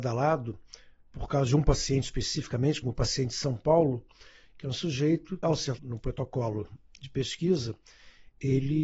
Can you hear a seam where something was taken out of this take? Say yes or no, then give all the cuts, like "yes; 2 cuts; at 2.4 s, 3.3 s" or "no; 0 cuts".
yes; 3 cuts; at 2.8 s, 5.4 s, 5.8 s